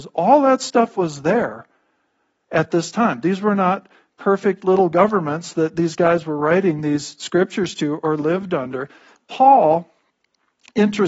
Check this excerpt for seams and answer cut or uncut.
uncut